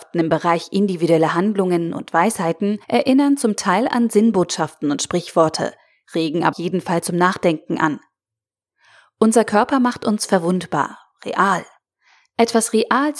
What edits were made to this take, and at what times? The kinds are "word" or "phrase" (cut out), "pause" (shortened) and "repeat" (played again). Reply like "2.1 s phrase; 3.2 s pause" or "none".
2.8 s pause; 6.5 s word

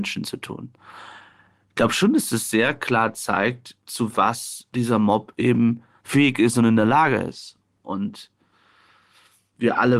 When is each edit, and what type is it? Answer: none

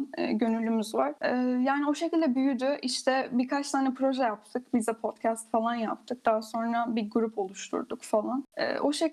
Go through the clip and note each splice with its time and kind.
none

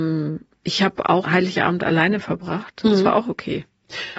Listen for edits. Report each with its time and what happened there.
1.2 s word

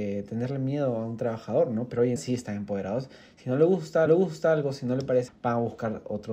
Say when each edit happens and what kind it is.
2.2 s word; 4.1 s repeat; 5.3 s word

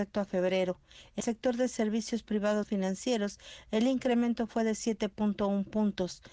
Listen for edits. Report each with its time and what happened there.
1.2 s word; 2.6 s word

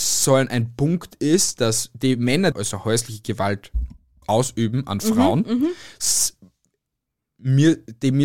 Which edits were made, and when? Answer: 2.5 s phrase; 4.2 s phrase

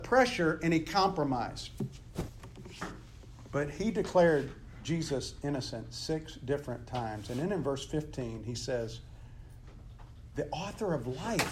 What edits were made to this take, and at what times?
none

